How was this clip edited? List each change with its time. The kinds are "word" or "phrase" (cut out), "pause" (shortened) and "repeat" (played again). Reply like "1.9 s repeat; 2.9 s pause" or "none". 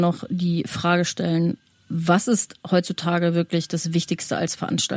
1.7 s pause